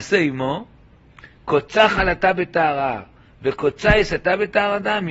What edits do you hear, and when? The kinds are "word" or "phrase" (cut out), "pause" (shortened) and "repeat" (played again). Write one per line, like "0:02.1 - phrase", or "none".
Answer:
none